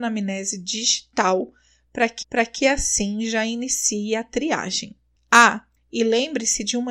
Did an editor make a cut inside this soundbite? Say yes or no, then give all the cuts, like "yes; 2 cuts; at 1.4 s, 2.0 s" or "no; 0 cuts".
yes; 1 cut; at 2.2 s